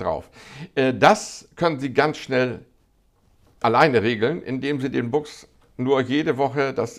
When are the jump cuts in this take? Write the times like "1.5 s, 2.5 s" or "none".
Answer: none

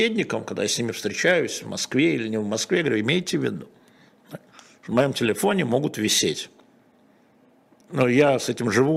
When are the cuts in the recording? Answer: none

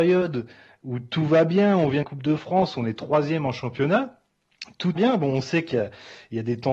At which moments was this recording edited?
2.0 s, 5.0 s

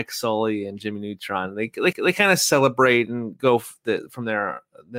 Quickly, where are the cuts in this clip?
1.9 s

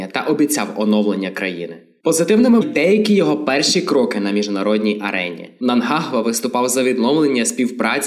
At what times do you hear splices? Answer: 2.6 s

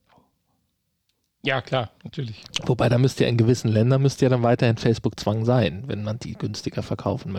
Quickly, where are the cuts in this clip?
none

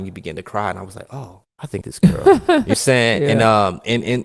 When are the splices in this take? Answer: 1.5 s, 1.8 s, 2.7 s

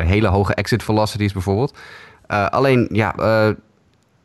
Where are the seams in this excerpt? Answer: 3.2 s

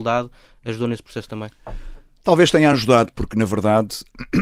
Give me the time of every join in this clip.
none

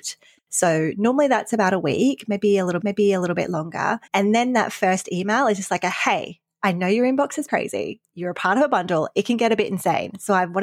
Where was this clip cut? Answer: 2.8 s, 4.1 s, 7.5 s

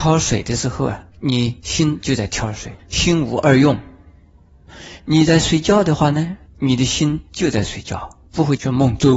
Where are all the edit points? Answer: 2.8 s, 8.3 s

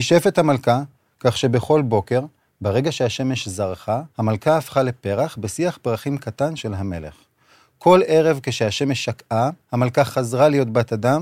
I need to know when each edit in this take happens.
4.1 s, 6.6 s, 9.6 s

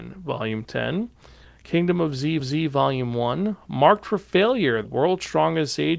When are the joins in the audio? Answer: 2.4 s, 4.8 s

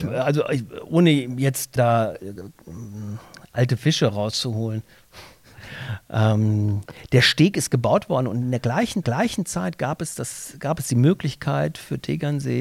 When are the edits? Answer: 1.8 s, 9.0 s

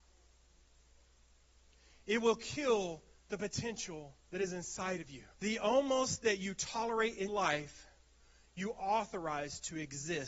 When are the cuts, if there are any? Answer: 5.3 s, 7.3 s

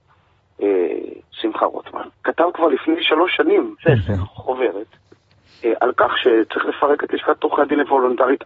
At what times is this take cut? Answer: 2.2 s, 3.8 s

